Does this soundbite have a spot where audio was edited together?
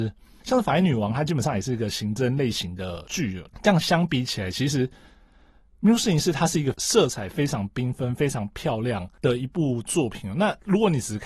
no; 0 cuts

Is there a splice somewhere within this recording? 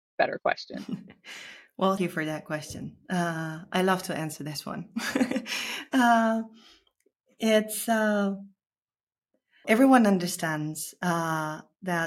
yes; 2 cuts; at 2.0 s, 9.6 s

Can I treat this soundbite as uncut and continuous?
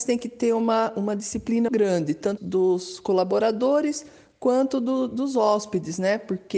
no; 2 cuts; at 1.7 s, 2.4 s

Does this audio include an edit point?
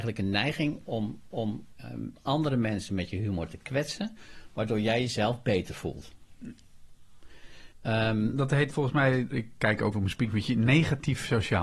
yes; 4 cuts; at 1.3 s, 7.7 s, 8.7 s, 9.9 s

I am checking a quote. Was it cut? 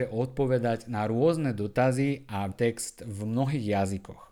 yes; 1 cut; at 2.5 s

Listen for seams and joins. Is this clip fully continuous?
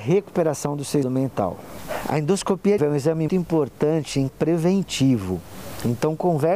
no; 4 cuts; at 1.0 s, 2.8 s, 3.3 s, 4.3 s

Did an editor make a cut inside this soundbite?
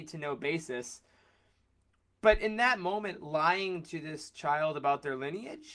no; 0 cuts

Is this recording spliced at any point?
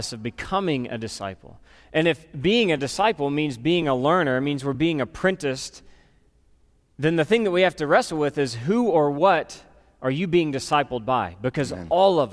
no; 0 cuts

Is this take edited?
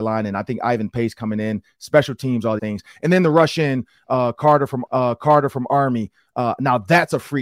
yes; 2 cuts; at 2.6 s, 4.9 s

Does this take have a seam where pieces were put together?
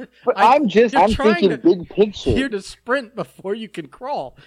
yes; 2 cuts; at 0.9 s, 2.5 s

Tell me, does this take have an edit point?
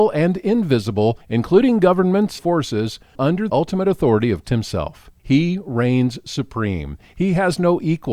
yes; 6 cuts; at 1.2 s, 2.4 s, 3.1 s, 3.5 s, 4.4 s, 5.2 s

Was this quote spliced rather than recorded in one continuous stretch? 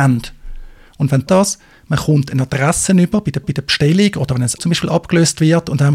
yes; 3 cuts; at 1.3 s, 3.4 s, 4.6 s

